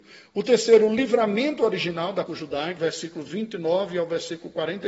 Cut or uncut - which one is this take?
cut